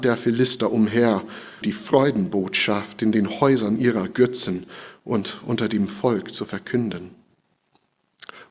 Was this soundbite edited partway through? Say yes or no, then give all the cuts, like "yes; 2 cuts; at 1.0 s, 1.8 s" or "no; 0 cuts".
yes; 1 cut; at 1.6 s